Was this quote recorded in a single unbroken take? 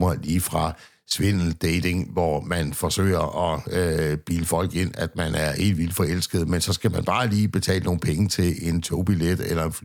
yes; 0 cuts

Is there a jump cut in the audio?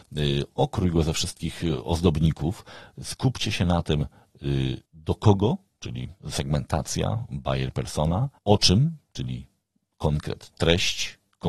yes; 3 cuts; at 4.8 s, 6.2 s, 8.4 s

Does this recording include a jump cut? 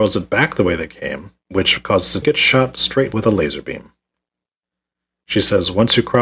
yes; 3 cuts; at 1.4 s, 2.2 s, 3.1 s

